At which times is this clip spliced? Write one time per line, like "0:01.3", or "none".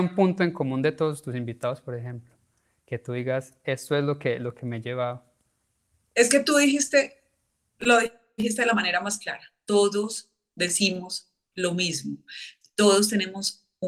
none